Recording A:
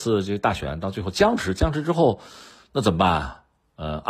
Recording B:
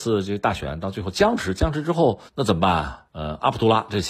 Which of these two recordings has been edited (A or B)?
B